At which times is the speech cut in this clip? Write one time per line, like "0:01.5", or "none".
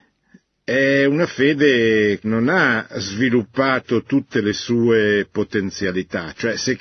0:02.2